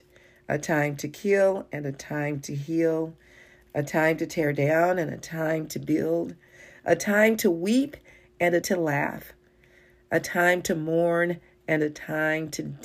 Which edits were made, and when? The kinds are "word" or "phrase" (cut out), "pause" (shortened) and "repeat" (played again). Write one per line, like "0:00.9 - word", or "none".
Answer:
0:08.6 - word